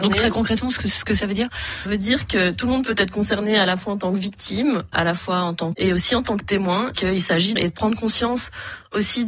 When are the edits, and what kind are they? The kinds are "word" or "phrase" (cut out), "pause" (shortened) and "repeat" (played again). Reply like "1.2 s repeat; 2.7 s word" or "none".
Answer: 1.9 s word; 4.9 s word; 5.7 s word; 7.0 s word; 7.6 s word